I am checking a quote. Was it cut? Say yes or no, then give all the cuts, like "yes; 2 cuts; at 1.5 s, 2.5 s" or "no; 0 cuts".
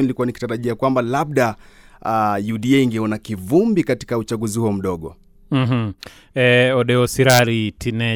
no; 0 cuts